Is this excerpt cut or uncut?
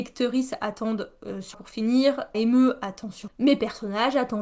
cut